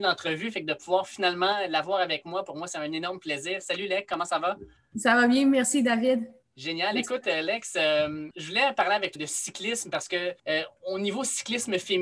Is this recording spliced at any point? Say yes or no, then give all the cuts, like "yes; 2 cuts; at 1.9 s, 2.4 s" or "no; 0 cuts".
yes; 2 cuts; at 9.2 s, 10.4 s